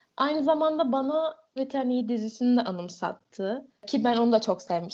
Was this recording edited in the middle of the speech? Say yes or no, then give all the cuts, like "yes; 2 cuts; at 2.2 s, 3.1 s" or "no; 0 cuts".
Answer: yes; 2 cuts; at 1.6 s, 3.8 s